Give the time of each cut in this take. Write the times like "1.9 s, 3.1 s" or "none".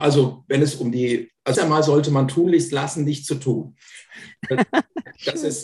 1.5 s